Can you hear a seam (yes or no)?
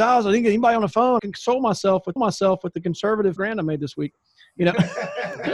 yes